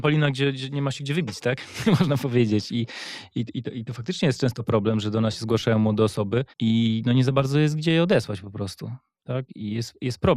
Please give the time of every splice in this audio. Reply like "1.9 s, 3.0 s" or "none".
6.5 s